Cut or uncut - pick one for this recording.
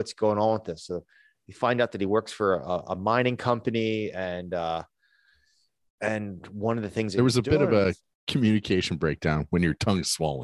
uncut